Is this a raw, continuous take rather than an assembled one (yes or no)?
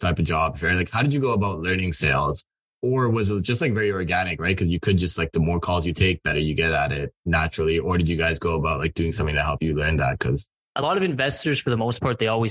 yes